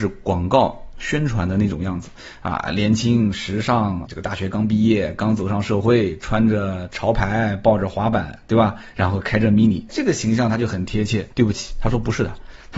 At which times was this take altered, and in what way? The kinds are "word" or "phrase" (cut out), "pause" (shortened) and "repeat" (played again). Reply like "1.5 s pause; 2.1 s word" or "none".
4.1 s word; 9.9 s word; 11.3 s pause